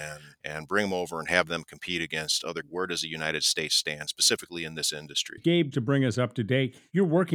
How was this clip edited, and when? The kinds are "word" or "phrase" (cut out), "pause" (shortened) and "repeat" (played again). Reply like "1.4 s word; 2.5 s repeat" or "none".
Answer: 2.6 s phrase; 5.7 s word